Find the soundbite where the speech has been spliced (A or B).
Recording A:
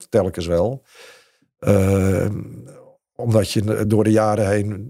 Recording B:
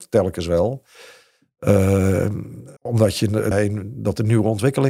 B